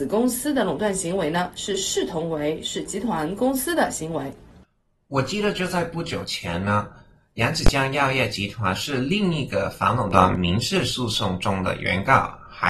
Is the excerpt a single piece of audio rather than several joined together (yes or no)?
yes